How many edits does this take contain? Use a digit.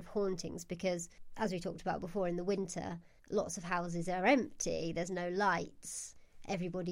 0